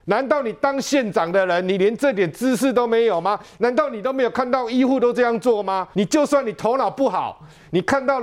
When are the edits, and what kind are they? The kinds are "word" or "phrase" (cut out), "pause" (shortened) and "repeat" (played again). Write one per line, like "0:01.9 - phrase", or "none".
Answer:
0:05.9 - pause